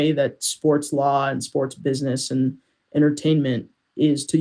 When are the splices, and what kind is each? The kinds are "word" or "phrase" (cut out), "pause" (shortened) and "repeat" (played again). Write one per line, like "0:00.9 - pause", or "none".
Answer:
none